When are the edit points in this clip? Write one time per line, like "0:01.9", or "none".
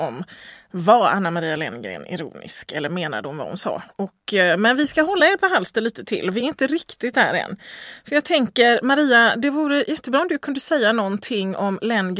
none